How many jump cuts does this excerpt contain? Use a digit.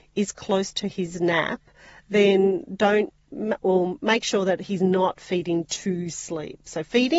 0